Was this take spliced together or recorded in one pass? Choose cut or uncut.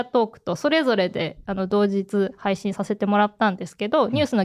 uncut